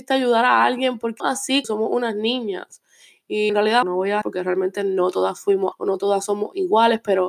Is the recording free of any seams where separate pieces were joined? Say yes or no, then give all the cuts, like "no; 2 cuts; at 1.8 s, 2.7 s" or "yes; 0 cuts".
no; 6 cuts; at 1.2 s, 1.6 s, 3.5 s, 3.8 s, 4.2 s, 5.7 s